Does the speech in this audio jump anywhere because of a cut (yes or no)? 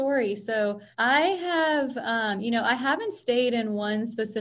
yes